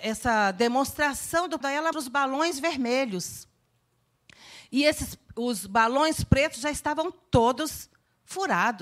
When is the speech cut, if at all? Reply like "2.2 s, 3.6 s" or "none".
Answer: 1.6 s, 1.9 s